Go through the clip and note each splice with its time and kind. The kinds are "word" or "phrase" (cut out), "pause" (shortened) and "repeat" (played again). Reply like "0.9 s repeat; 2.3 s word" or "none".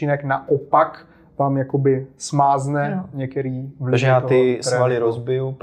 none